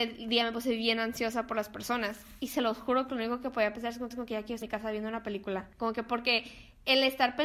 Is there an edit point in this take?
yes; 3 cuts; at 4.1 s, 4.6 s, 5.7 s

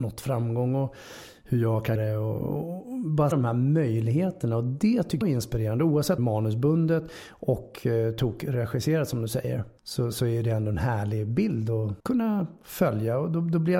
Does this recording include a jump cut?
yes; 6 cuts; at 1.9 s, 3.3 s, 5.2 s, 6.2 s, 9.8 s, 12.0 s

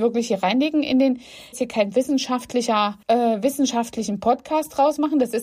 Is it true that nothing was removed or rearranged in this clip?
no; 2 cuts; at 1.5 s, 3.0 s

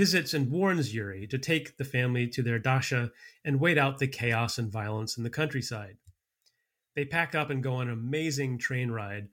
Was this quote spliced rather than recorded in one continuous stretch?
no; 0 cuts

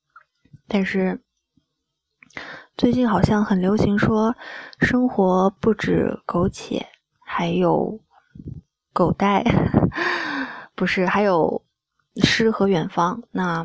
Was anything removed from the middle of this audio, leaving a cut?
no; 0 cuts

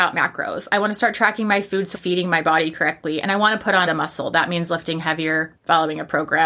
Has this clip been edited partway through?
yes; 2 cuts; at 1.9 s, 3.9 s

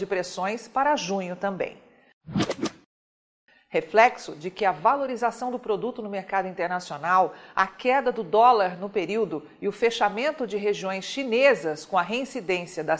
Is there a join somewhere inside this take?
no; 0 cuts

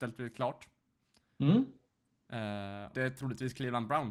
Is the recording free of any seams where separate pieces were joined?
no; 1 cut; at 2.9 s

